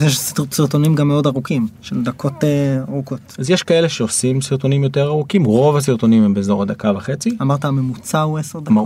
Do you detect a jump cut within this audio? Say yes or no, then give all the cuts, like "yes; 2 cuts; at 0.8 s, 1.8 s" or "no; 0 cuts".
no; 0 cuts